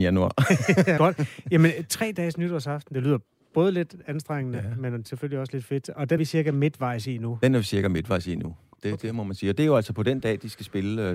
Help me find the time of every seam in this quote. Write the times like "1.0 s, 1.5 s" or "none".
1.0 s, 6.2 s